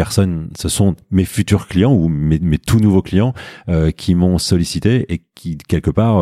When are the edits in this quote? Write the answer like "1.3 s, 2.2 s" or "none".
none